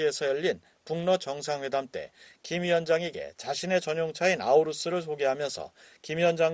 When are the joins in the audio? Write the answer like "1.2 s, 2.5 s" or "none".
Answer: none